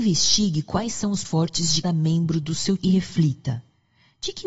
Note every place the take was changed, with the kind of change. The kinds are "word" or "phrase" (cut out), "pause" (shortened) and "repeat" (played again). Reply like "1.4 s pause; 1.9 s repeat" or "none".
1.2 s word; 1.8 s word; 2.8 s word